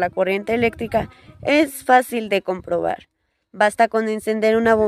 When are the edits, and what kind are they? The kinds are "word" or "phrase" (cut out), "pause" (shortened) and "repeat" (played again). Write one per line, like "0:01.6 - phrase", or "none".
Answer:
none